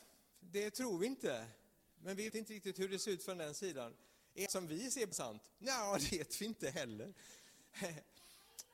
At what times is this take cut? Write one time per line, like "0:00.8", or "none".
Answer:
0:02.3
0:04.5
0:05.1
0:06.1